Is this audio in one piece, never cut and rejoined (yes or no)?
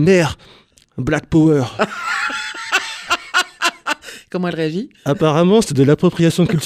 yes